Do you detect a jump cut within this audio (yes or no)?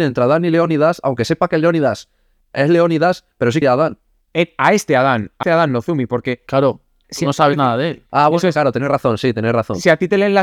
yes